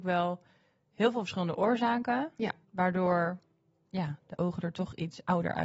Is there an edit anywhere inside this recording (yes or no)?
yes